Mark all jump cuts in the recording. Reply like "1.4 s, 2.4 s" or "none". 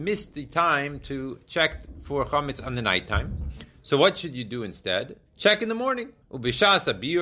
5.3 s, 6.2 s